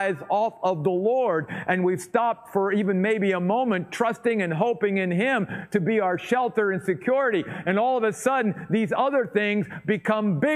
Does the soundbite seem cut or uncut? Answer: uncut